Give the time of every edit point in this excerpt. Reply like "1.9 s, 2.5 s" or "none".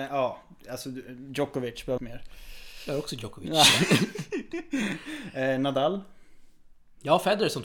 2.0 s